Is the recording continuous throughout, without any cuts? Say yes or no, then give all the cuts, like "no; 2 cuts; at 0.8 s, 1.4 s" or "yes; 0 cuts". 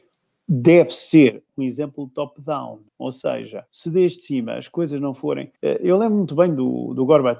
no; 3 cuts; at 2.9 s, 3.7 s, 5.6 s